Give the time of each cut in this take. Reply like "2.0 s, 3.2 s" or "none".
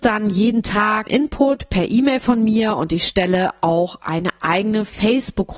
1.1 s

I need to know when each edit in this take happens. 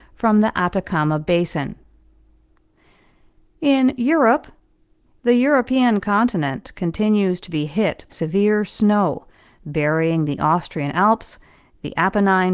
8.1 s

